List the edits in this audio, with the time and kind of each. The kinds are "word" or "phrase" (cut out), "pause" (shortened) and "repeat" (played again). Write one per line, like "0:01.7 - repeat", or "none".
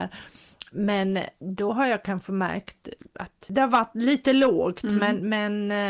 none